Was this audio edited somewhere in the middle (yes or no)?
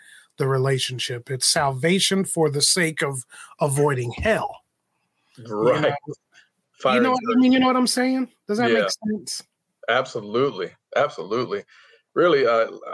no